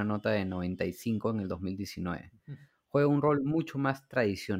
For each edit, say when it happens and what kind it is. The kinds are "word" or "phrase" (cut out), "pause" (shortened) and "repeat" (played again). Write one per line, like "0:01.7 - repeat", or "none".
none